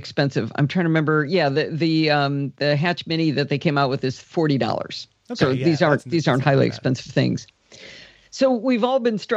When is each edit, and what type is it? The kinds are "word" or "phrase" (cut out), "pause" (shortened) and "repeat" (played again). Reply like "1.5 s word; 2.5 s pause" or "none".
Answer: none